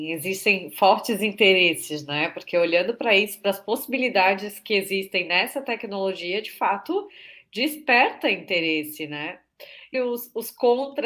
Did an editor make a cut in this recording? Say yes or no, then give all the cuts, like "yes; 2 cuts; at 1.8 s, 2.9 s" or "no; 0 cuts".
yes; 1 cut; at 9.9 s